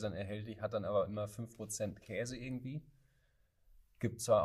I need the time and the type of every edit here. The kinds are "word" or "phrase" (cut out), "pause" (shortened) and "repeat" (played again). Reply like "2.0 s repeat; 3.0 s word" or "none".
none